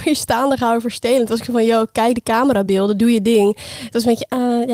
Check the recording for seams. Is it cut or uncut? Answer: uncut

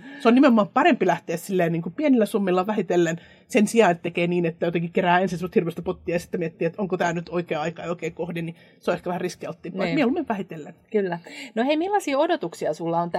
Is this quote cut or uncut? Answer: uncut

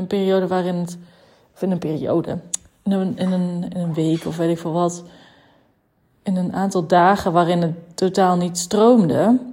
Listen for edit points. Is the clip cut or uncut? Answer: uncut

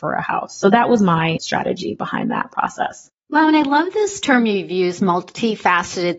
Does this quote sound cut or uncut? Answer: uncut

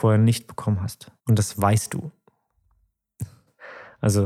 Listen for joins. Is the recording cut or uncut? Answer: cut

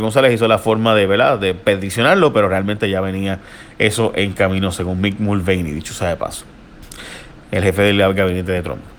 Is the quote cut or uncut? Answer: uncut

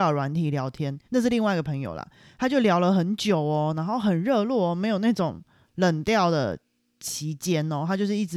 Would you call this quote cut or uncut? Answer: cut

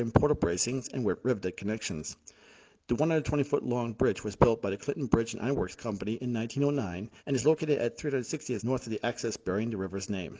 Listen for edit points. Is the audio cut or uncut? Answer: cut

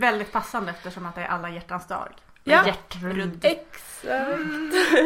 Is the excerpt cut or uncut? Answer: uncut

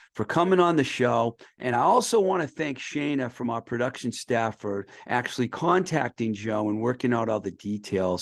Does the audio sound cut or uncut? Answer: uncut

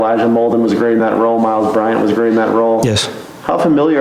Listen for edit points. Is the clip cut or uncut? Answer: uncut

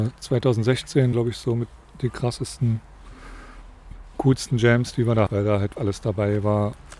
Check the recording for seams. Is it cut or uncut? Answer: cut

